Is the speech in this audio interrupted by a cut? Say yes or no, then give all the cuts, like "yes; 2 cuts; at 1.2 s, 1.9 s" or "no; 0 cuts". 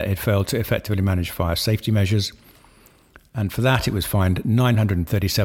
no; 0 cuts